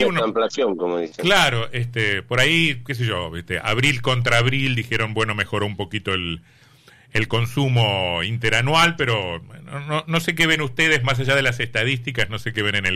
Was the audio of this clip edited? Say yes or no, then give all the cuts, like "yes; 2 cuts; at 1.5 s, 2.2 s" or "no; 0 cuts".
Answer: no; 0 cuts